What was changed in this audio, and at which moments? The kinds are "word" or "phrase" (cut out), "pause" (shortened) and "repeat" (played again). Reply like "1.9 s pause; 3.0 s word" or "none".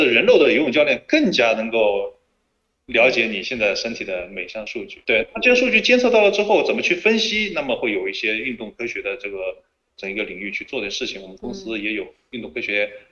5.0 s word